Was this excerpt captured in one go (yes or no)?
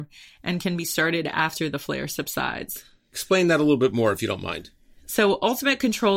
yes